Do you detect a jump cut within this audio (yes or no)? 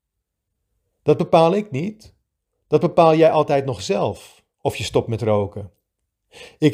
no